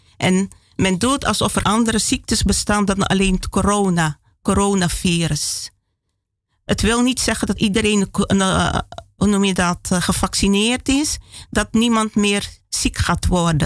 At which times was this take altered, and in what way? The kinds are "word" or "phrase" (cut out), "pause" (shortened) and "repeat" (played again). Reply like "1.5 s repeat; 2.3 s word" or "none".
1.6 s word; 7.6 s word